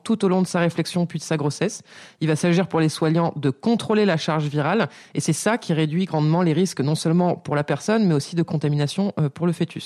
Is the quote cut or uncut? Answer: uncut